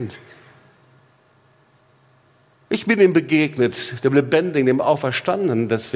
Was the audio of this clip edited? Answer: no; 0 cuts

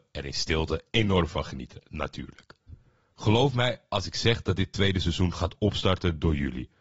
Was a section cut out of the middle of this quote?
no; 0 cuts

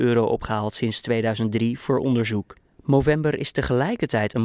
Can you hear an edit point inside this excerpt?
no; 0 cuts

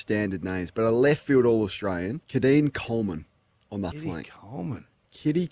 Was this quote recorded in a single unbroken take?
no; 2 cuts; at 2.2 s, 3.9 s

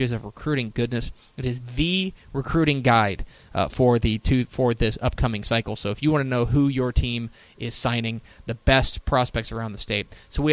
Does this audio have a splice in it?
no; 0 cuts

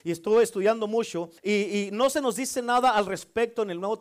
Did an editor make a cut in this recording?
yes; 1 cut; at 1.4 s

